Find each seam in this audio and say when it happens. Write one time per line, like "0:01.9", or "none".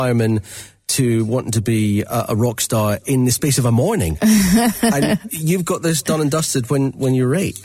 none